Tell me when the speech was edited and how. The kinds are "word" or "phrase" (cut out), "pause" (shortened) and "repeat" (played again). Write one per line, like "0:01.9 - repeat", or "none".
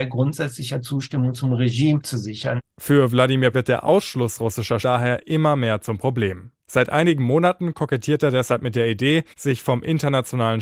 0:03.5 - word
0:04.8 - word
0:06.6 - pause
0:09.3 - pause